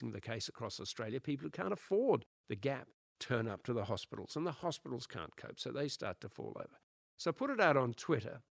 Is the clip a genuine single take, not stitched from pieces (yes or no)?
yes